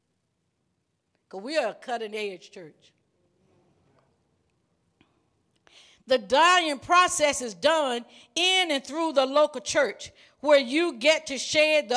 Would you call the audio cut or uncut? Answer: uncut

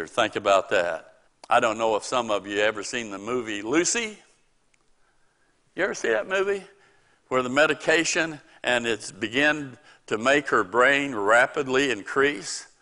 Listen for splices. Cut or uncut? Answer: cut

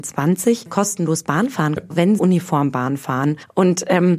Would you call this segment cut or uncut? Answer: cut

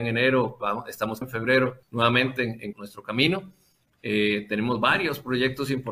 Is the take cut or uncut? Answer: cut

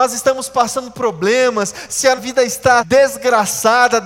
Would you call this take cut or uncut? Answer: cut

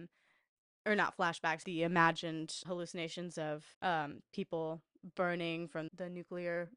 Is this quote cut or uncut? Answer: cut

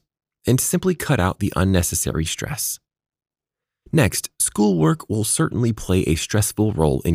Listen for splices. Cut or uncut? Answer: uncut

